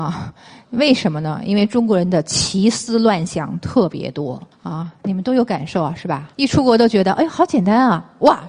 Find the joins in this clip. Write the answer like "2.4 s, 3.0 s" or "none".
4.5 s, 6.3 s

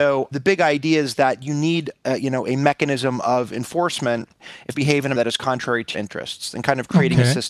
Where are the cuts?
4.7 s, 5.1 s, 5.9 s

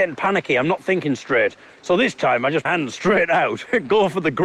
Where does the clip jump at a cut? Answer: 2.7 s

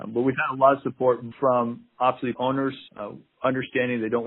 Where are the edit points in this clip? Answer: 1.3 s, 2.3 s, 2.9 s

